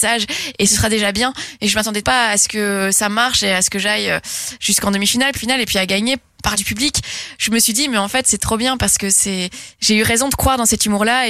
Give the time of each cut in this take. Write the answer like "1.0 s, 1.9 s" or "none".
2.0 s, 5.4 s, 6.5 s